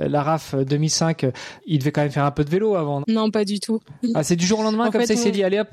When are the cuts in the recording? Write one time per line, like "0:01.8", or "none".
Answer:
0:01.6
0:03.0